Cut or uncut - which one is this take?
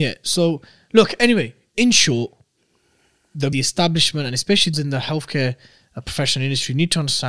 cut